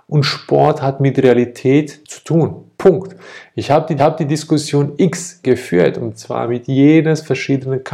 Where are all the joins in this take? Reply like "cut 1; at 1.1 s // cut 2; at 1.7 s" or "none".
cut 1; at 2.0 s // cut 2; at 2.8 s // cut 3; at 4.0 s // cut 4; at 5.4 s